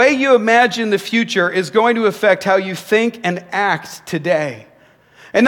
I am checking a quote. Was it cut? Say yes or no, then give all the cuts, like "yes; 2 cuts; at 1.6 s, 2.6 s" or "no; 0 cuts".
no; 0 cuts